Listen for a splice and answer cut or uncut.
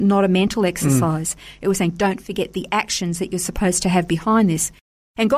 uncut